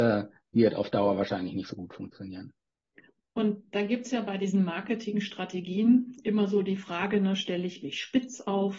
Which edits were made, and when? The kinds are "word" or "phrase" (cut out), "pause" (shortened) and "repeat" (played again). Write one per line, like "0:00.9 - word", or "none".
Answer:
none